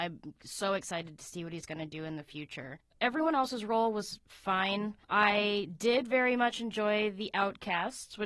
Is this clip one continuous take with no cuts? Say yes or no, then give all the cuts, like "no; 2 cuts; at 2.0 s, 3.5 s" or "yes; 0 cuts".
no; 1 cut; at 5.0 s